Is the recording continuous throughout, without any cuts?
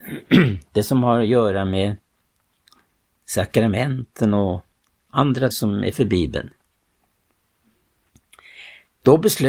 no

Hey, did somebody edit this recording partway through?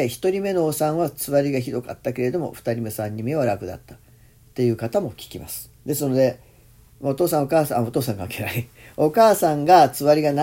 yes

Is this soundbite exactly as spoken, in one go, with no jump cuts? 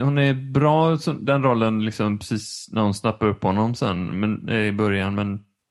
yes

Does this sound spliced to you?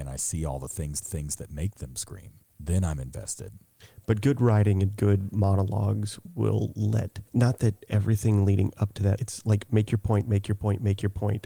yes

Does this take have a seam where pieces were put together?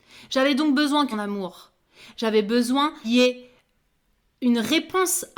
yes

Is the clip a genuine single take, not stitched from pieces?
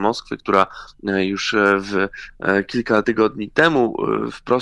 yes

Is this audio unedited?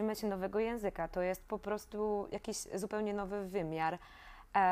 yes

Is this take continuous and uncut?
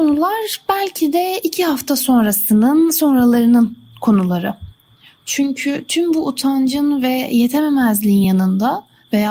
yes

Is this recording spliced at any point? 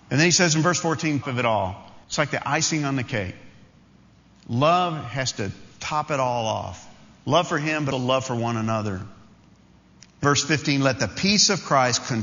yes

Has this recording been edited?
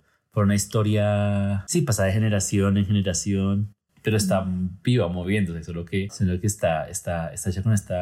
no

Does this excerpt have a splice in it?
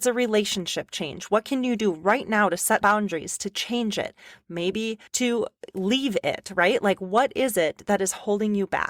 yes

